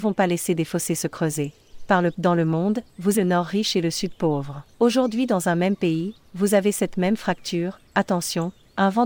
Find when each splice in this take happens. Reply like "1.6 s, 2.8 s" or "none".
2.1 s, 3.1 s, 4.7 s